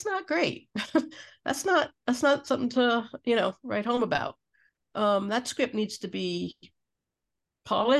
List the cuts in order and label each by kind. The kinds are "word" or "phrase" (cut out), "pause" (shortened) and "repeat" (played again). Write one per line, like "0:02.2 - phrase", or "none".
none